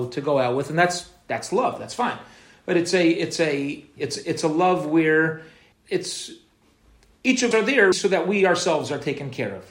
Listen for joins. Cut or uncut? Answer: cut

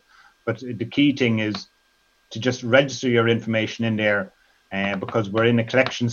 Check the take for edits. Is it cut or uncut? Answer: uncut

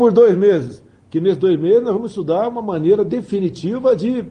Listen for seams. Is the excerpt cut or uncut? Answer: uncut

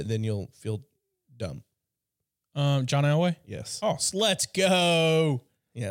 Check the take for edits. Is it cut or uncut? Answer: uncut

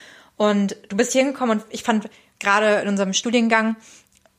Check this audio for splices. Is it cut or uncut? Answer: uncut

